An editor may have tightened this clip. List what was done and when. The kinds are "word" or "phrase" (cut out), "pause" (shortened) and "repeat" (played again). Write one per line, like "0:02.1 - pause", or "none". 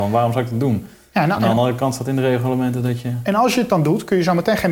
none